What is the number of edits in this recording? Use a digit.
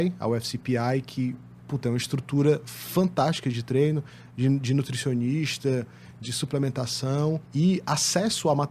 1